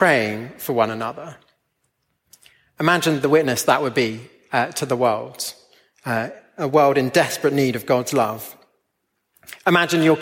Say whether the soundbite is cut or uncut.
uncut